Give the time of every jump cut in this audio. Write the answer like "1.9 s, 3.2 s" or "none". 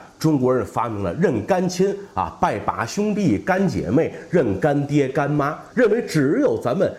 5.7 s